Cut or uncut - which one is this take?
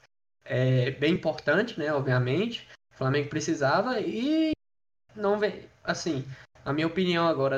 uncut